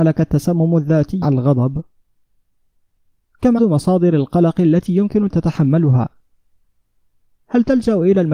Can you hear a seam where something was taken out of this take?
yes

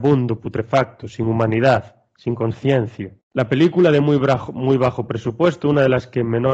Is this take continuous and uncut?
no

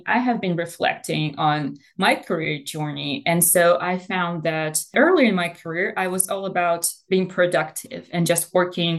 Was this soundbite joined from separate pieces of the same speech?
no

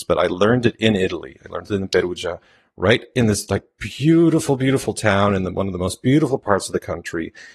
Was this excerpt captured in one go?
yes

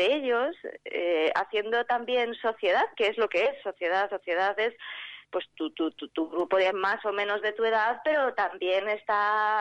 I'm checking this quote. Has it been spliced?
yes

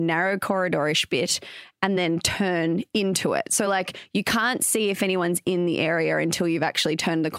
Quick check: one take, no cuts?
yes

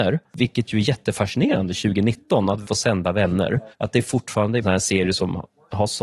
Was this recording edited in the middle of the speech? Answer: yes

